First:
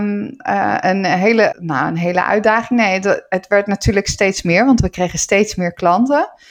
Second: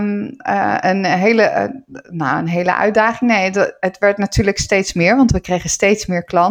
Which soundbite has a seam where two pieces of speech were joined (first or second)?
first